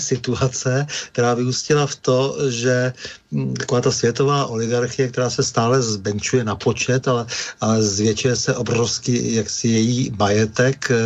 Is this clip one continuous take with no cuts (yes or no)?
yes